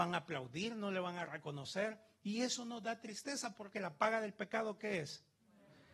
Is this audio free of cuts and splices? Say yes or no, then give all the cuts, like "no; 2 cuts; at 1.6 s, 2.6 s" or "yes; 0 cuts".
no; 1 cut; at 3.7 s